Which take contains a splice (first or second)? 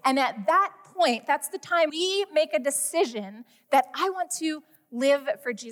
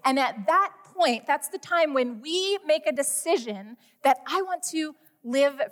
first